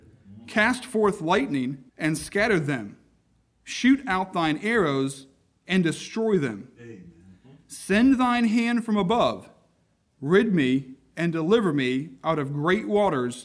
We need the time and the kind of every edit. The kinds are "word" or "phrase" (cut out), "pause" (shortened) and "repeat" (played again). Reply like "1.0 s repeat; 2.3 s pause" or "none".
1.9 s pause